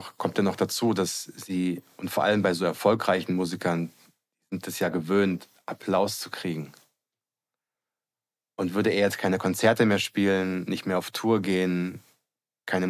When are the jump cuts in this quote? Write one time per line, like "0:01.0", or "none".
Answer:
none